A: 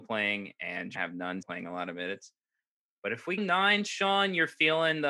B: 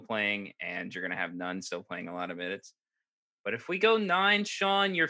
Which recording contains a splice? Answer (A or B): A